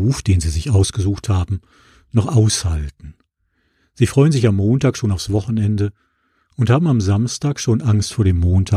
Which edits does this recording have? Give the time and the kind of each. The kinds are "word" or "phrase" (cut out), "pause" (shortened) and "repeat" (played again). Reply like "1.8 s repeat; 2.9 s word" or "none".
none

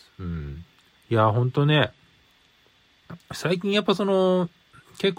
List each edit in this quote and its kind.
0.9 s pause

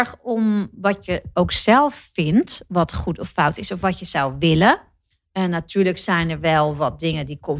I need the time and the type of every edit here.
none

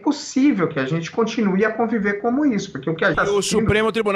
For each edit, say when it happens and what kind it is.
3.1 s word

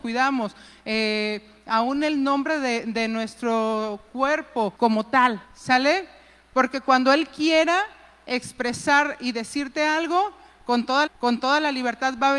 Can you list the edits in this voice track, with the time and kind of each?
4.8 s pause; 5.4 s pause; 11.1 s repeat

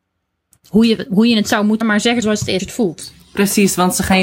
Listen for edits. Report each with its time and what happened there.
1.8 s word; 2.2 s word; 2.6 s word

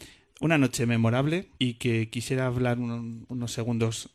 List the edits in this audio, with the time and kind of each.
1.5 s pause

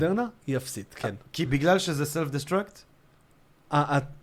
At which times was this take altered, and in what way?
none

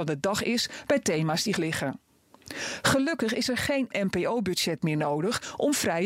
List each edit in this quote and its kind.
1.6 s word; 3.9 s word

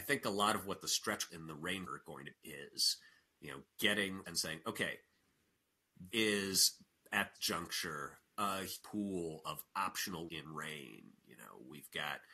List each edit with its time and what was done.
1.3 s word; 1.9 s word; 2.3 s word; 4.2 s word; 6.1 s word; 7.3 s word; 8.8 s word; 10.3 s word

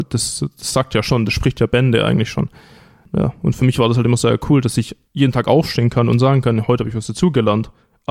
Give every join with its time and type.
none

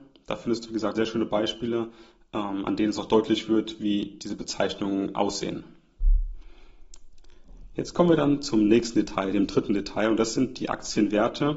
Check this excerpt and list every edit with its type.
0.9 s word

